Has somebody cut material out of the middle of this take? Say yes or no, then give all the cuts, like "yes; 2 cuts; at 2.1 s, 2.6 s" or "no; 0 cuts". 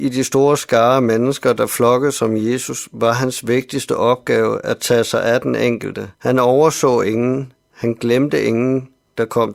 yes; 1 cut; at 6.1 s